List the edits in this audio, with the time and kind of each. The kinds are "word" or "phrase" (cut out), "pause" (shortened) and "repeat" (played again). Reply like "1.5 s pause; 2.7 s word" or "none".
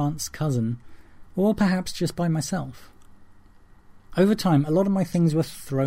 4.0 s pause